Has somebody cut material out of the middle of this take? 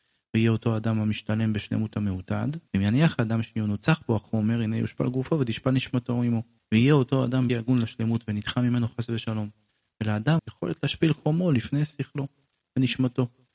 yes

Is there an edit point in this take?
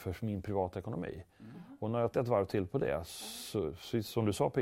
yes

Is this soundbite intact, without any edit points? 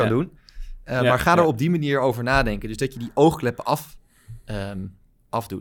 yes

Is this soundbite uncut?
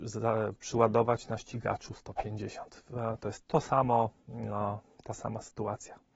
yes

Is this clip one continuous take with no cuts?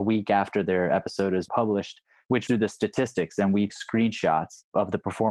no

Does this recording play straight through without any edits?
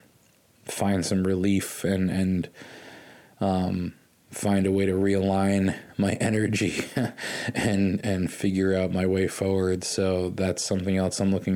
yes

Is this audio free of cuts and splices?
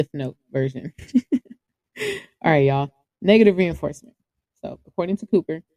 yes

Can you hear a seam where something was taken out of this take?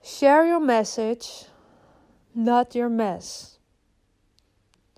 no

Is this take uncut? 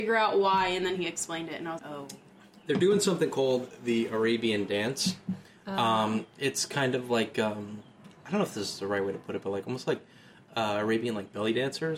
no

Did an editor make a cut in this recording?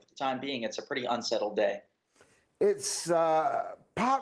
no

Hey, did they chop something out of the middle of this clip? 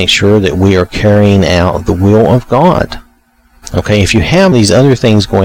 yes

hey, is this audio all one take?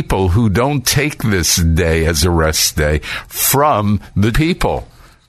no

